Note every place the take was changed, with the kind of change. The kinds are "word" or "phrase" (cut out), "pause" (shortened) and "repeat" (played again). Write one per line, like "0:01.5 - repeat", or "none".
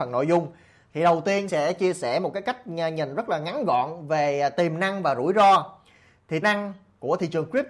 0:01.5 - word
0:06.4 - word